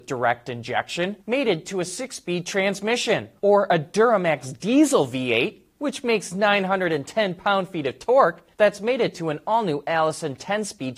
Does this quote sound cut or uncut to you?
cut